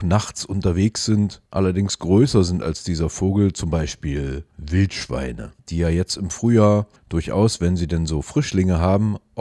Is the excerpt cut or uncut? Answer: cut